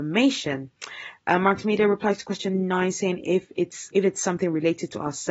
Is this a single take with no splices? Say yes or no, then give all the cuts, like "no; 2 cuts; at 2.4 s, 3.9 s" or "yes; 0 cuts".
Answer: no; 1 cut; at 3.9 s